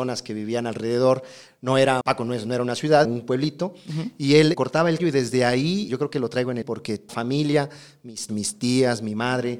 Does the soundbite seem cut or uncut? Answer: cut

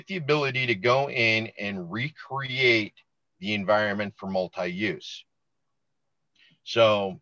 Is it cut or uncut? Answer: uncut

